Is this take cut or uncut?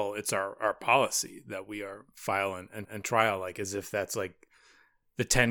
cut